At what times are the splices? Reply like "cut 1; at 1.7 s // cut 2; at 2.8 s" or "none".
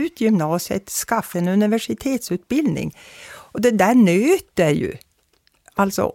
cut 1; at 1.3 s